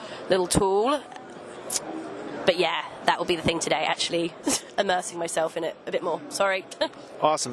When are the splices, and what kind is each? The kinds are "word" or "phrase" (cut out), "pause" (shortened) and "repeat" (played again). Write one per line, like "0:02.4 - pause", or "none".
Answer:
none